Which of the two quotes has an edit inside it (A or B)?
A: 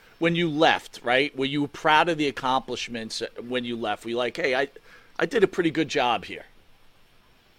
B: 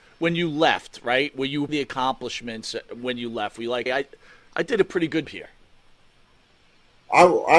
B